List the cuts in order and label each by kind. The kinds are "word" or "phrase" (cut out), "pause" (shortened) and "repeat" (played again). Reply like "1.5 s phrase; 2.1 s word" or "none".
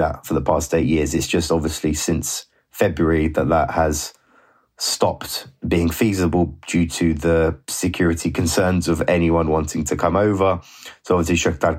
none